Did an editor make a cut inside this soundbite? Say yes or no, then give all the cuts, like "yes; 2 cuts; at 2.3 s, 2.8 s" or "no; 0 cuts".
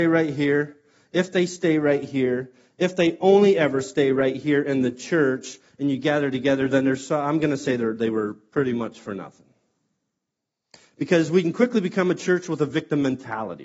no; 0 cuts